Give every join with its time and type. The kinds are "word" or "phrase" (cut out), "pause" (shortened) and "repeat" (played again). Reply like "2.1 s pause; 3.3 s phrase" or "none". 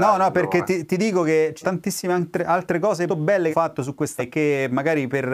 1.6 s word; 3.1 s word; 3.5 s word; 4.2 s word